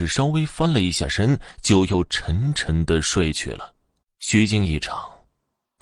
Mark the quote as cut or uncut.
cut